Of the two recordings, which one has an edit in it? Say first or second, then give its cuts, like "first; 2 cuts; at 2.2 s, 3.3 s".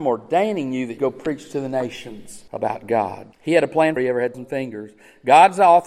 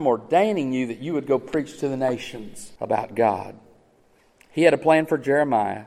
first; 4 cuts; at 1.0 s, 3.3 s, 4.0 s, 4.3 s